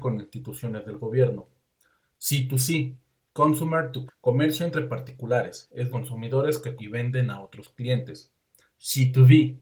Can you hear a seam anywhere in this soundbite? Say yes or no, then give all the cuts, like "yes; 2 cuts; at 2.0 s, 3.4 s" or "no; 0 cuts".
yes; 3 cuts; at 4.1 s, 5.9 s, 6.8 s